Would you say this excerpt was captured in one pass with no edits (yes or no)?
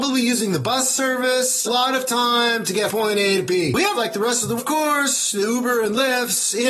no